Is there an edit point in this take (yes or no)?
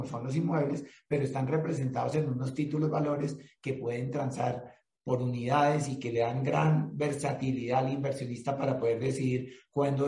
no